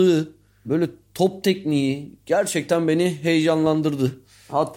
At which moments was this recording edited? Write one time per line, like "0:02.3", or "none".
none